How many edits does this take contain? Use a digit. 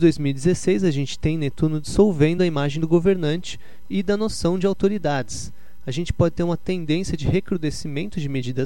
0